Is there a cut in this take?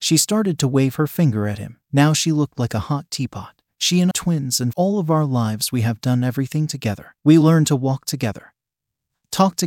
yes; 4 cuts; at 1.8 s, 4.1 s, 4.7 s, 7.2 s

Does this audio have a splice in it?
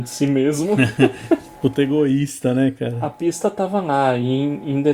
no; 0 cuts

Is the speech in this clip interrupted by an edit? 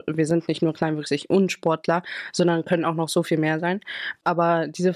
no; 0 cuts

